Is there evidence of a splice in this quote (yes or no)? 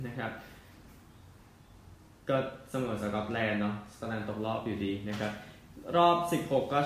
no